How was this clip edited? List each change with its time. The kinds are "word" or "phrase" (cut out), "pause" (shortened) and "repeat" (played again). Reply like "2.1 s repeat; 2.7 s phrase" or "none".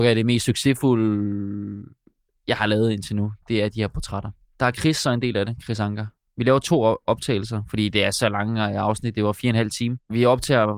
none